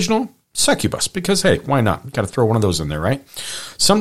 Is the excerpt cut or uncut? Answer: uncut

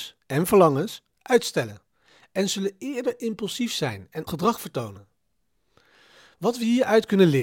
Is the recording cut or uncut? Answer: cut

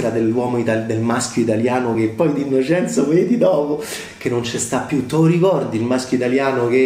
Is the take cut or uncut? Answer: uncut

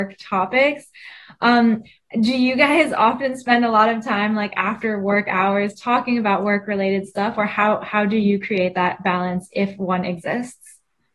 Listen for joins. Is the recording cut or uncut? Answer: uncut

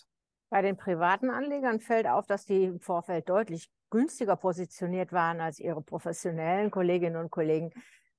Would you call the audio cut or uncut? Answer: uncut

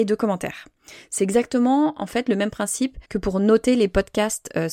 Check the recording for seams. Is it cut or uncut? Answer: cut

